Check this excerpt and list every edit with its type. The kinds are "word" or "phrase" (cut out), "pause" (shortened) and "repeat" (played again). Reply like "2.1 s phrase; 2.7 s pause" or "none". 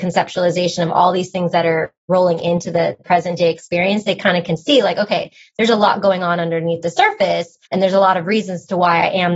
7.7 s pause